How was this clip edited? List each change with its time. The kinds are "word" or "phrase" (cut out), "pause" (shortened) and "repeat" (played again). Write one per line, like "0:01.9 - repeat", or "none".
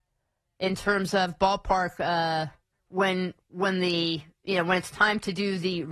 0:02.7 - pause